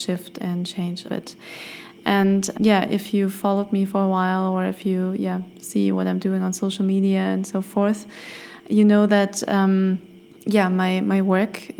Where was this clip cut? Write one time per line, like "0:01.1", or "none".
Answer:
0:01.1
0:02.5
0:10.2